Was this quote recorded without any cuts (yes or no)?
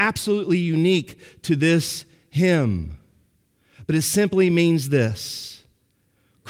yes